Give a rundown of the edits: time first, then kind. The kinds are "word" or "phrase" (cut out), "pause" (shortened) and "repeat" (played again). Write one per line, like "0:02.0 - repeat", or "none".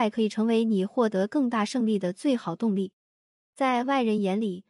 0:03.0 - pause